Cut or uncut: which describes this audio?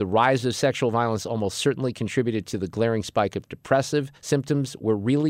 cut